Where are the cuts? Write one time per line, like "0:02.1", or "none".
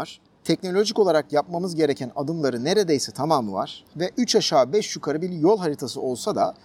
none